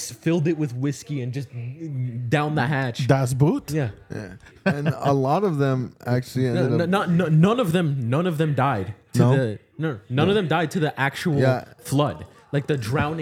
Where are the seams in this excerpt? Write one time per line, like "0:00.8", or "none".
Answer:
none